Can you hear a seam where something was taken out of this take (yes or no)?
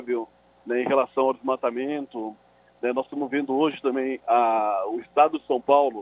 no